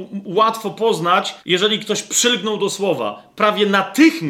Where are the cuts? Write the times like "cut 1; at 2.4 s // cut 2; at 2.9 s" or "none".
cut 1; at 1.4 s